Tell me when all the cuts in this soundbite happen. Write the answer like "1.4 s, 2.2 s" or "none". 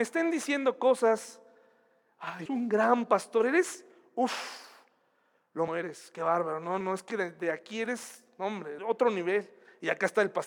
2.5 s, 5.7 s, 6.8 s, 8.8 s